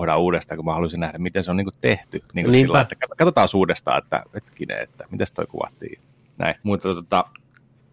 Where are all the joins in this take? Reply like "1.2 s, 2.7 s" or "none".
3.2 s, 6.6 s